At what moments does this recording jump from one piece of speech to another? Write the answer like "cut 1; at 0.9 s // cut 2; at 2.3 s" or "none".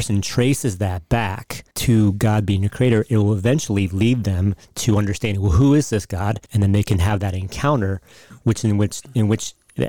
cut 1; at 1.7 s // cut 2; at 6.5 s